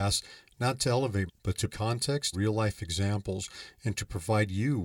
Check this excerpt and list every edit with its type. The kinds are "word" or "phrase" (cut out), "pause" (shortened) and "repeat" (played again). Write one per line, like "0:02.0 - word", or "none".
0:01.3 - word
0:01.7 - word
0:02.3 - word